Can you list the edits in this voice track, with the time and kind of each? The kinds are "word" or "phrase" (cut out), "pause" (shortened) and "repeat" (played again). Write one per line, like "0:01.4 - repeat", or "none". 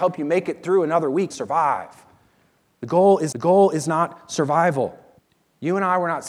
0:01.3 - word
0:03.3 - repeat
0:05.2 - pause